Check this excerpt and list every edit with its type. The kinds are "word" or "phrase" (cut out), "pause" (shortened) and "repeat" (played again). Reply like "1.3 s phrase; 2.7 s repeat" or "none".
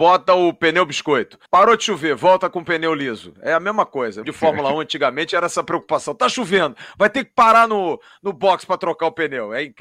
1.5 s pause; 4.2 s phrase